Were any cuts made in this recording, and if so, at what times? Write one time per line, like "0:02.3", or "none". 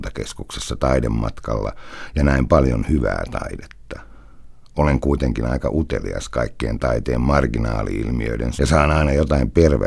0:08.6